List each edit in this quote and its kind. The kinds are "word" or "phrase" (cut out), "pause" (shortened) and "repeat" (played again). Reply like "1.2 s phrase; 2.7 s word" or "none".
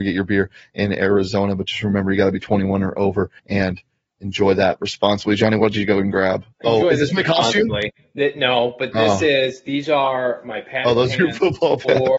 3.4 s pause; 6.5 s pause